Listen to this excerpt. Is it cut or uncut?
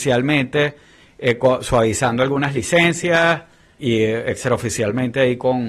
cut